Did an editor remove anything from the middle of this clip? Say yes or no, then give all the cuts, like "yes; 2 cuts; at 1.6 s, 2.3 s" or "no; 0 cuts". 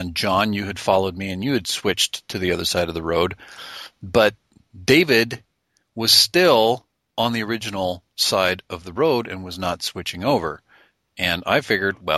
no; 0 cuts